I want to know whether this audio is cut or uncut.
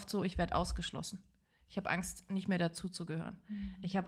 uncut